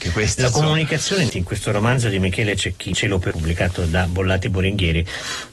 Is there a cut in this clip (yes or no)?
yes